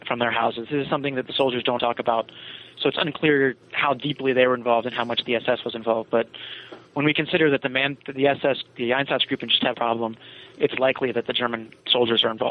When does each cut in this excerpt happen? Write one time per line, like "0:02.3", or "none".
0:01.8
0:03.6
0:08.7
0:09.7